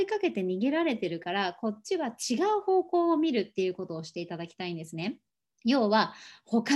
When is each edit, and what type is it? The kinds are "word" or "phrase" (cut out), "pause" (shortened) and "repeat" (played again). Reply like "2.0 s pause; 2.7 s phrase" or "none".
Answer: 5.3 s pause